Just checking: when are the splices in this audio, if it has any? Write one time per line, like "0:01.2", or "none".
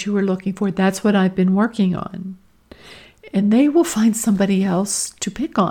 none